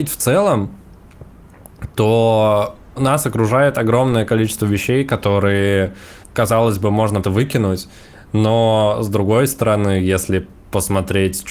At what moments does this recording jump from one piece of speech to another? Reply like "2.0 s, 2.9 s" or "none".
3.0 s, 6.2 s, 7.2 s